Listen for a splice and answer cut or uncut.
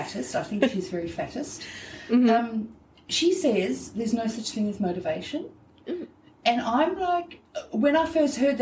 uncut